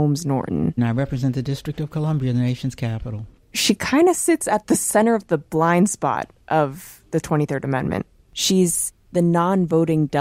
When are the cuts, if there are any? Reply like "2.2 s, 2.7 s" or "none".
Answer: none